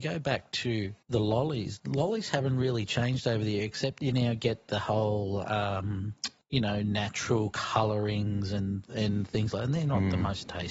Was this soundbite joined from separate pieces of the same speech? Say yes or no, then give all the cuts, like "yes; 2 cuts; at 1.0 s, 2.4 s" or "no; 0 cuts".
yes; 2 cuts; at 1.0 s, 6.4 s